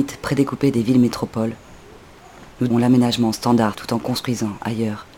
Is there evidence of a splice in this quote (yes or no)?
yes